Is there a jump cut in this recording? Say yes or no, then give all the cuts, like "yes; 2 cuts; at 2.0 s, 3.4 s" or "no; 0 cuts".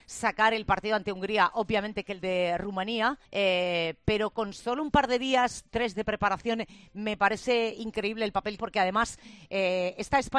yes; 3 cuts; at 3.3 s, 5.9 s, 8.6 s